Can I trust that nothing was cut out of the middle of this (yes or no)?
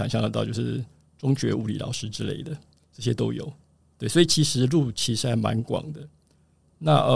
yes